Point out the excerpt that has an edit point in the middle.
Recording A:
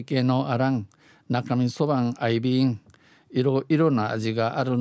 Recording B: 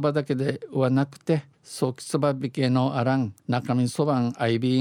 B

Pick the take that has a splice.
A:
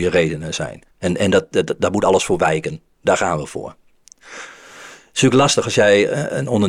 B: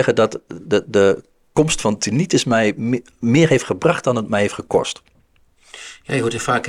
A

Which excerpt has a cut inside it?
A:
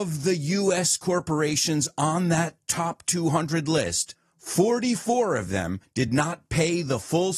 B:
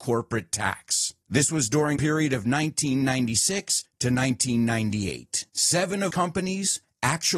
B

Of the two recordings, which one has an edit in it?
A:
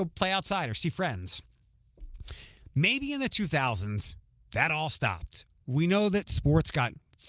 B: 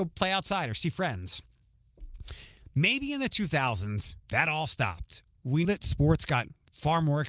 B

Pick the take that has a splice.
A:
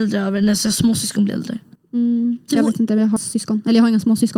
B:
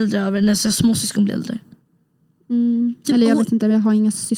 A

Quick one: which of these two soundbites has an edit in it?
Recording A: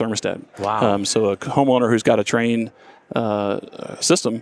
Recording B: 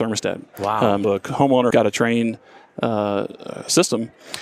B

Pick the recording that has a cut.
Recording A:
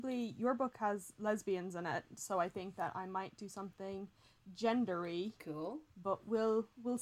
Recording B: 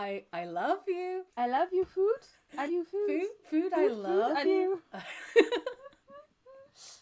B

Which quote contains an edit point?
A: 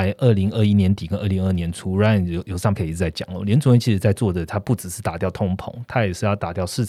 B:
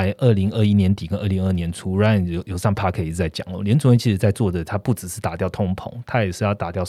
A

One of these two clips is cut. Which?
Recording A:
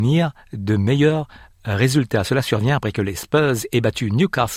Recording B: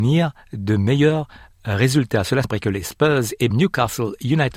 B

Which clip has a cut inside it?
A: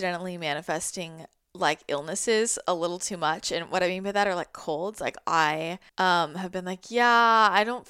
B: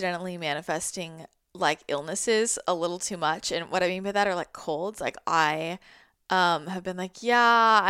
A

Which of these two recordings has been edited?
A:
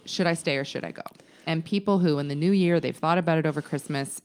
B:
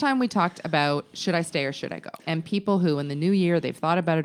B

